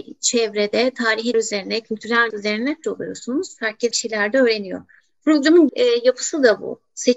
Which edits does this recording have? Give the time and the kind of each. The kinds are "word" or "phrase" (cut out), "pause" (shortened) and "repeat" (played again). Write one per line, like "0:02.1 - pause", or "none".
0:01.3 - word
0:02.3 - word
0:02.8 - word
0:03.9 - word
0:05.7 - word

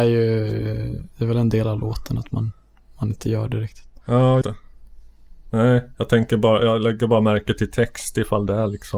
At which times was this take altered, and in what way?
0:01.1 - pause
0:04.4 - word

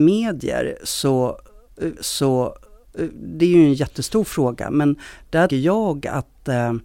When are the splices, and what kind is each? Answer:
0:02.0 - repeat
0:05.5 - word

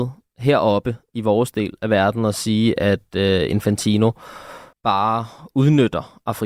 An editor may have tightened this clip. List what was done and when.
0:04.7 - pause

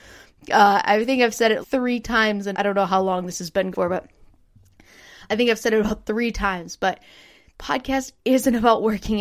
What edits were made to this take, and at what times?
0:01.6 - word
0:02.5 - word
0:03.7 - word
0:07.5 - word

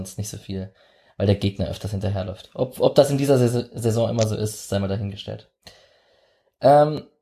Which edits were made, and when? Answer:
none

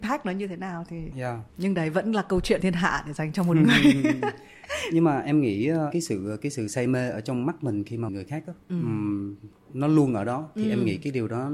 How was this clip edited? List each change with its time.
0:01.1 - word
0:01.5 - pause
0:02.6 - word
0:08.1 - phrase
0:08.6 - pause

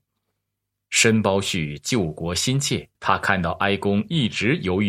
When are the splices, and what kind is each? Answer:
0:02.9 - pause

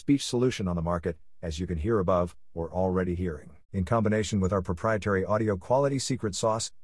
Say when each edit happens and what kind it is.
0:02.7 - word
0:03.6 - pause

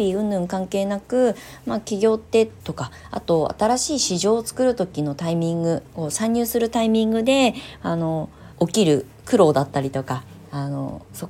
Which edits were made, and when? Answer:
0:02.6 - pause
0:08.5 - pause

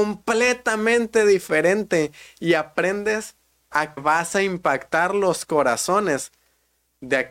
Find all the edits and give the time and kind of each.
0:04.0 - word

